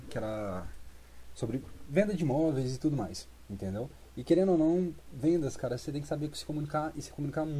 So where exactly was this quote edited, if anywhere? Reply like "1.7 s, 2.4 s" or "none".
none